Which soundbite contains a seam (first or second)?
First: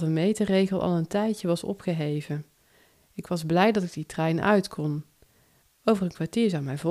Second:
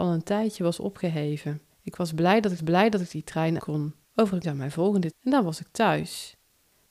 second